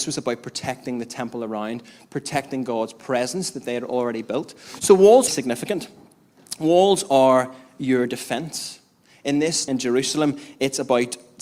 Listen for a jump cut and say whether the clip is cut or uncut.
cut